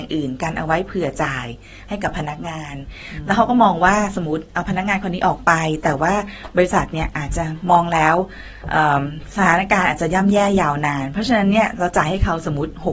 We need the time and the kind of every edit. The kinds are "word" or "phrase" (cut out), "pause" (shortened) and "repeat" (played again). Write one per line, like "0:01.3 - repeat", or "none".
none